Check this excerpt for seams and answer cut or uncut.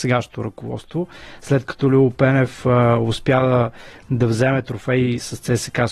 uncut